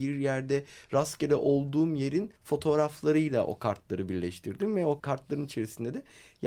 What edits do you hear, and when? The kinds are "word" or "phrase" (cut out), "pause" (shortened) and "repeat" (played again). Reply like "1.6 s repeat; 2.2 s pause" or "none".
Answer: 2.4 s pause; 5.0 s word

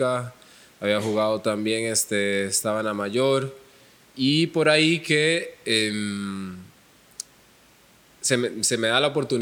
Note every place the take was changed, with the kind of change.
none

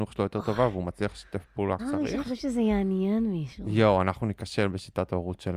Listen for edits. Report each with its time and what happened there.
1.8 s word

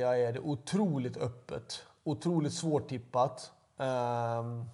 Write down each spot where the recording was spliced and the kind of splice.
none

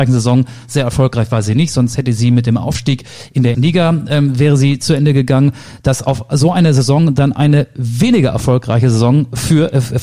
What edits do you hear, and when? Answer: 3.5 s word

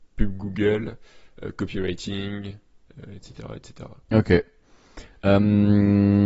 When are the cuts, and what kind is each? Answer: 4.0 s pause

